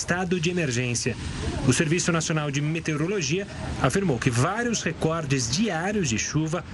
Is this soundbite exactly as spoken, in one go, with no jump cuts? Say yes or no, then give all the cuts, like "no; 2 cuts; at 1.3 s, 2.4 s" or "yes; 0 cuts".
yes; 0 cuts